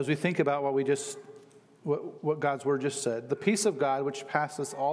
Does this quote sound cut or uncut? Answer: uncut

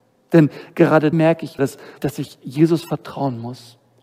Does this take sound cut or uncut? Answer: cut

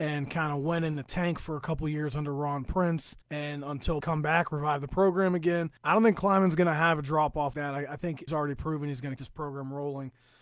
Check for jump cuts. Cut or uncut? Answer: cut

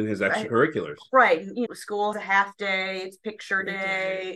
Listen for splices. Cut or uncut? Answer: cut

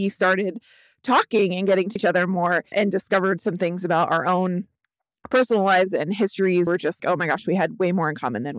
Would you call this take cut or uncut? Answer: cut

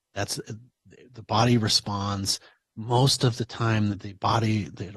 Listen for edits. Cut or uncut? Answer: cut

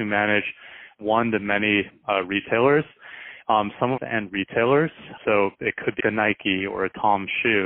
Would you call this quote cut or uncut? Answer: cut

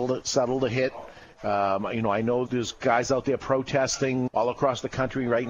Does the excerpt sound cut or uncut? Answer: cut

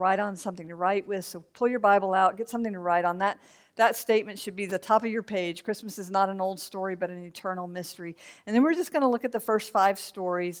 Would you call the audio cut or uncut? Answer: uncut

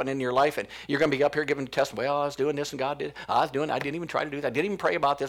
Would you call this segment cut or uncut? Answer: uncut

